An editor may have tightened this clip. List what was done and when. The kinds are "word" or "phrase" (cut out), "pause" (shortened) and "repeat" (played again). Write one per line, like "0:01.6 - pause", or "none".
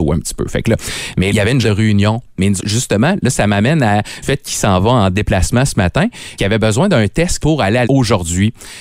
0:01.3 - word
0:01.6 - word
0:02.6 - word
0:04.2 - word
0:06.4 - word
0:07.4 - word
0:07.8 - word